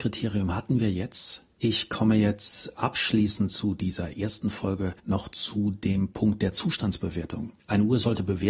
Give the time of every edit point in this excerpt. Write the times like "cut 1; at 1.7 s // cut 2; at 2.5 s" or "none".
cut 1; at 1.5 s // cut 2; at 5.0 s